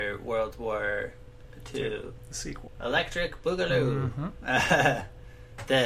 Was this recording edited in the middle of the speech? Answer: no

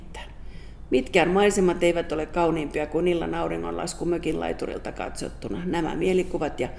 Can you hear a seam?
no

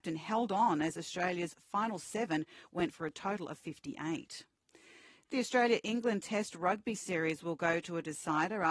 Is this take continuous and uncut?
yes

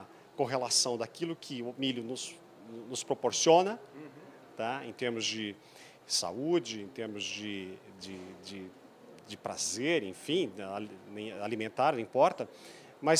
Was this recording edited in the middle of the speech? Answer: no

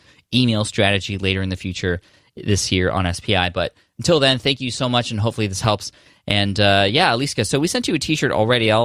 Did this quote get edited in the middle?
no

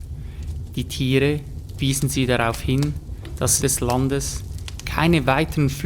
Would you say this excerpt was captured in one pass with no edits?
no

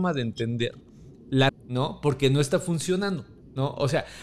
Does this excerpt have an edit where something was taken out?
yes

